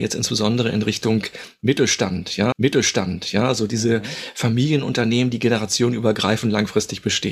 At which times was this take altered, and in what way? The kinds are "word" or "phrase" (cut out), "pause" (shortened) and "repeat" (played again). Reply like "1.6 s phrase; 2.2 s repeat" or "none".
2.5 s repeat